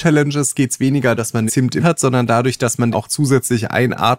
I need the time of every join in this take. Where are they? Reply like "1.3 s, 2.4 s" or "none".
1.2 s, 1.5 s, 1.8 s, 2.9 s